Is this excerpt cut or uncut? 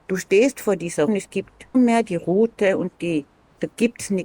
cut